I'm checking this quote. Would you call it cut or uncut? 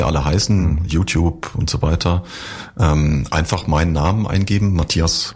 uncut